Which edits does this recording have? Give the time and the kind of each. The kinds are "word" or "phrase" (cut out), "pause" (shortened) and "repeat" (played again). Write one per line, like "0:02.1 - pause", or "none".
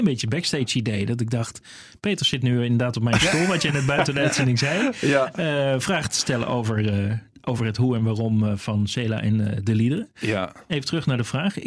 none